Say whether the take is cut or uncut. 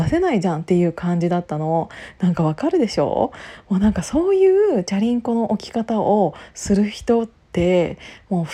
cut